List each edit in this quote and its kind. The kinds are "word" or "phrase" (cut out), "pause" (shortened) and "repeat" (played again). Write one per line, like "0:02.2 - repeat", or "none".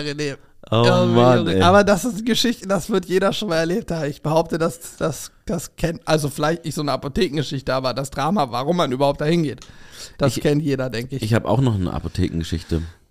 0:05.4 - pause